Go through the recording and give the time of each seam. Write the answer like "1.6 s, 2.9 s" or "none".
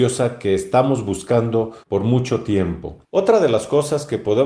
1.8 s, 3.0 s